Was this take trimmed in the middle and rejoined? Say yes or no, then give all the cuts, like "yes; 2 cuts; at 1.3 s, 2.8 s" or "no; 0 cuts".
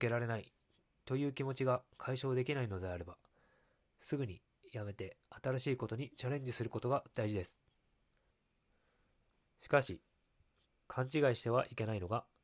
no; 0 cuts